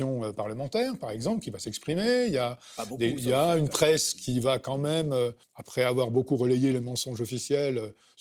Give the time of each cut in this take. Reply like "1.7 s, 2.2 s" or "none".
5.4 s